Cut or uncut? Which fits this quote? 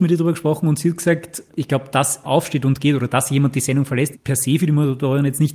cut